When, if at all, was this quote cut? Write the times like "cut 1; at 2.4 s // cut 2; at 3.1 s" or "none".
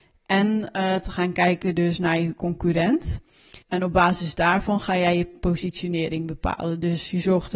cut 1; at 3.6 s